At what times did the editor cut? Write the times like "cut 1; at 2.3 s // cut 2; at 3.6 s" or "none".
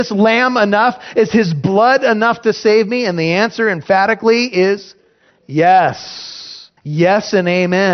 cut 1; at 6.8 s